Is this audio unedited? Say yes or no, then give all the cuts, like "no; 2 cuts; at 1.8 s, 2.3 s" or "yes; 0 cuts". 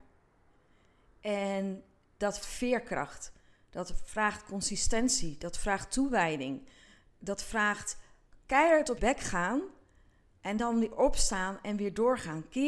no; 3 cuts; at 2.4 s, 8.3 s, 9.0 s